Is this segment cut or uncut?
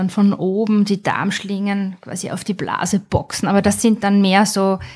uncut